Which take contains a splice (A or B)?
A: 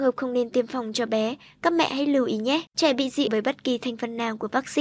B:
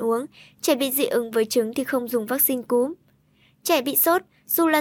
A